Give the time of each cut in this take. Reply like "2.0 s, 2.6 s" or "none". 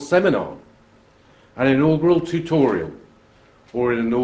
none